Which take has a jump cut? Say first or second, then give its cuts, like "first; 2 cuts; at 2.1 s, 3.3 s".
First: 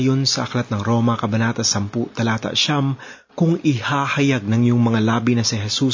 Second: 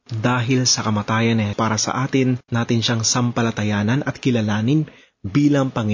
second; 2 cuts; at 1.5 s, 2.5 s